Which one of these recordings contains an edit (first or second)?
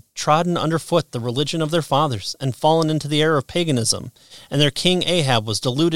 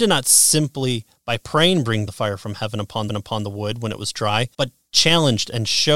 second